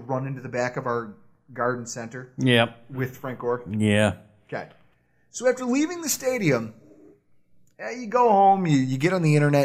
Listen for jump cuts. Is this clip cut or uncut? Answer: uncut